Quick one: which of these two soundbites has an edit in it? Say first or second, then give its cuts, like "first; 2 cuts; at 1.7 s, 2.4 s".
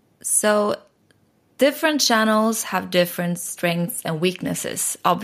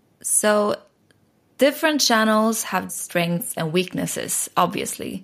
second; 1 cut; at 2.9 s